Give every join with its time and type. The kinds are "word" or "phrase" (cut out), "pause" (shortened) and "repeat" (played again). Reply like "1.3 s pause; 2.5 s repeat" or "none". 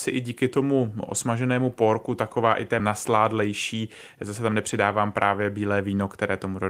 2.8 s phrase